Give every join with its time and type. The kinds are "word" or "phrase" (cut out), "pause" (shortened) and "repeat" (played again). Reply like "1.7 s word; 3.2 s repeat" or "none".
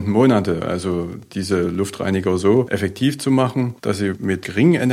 none

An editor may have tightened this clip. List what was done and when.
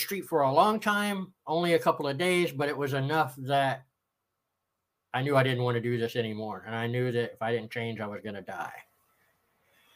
none

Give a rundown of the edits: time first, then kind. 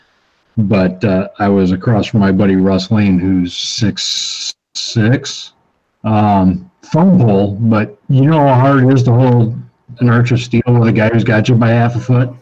5.8 s pause

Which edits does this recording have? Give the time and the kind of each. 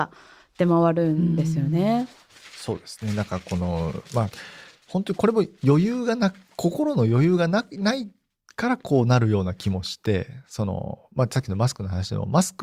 none

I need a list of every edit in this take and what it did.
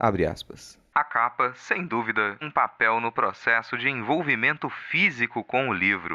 2.4 s word

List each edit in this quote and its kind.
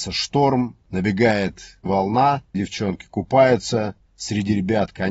1.9 s word; 2.5 s phrase

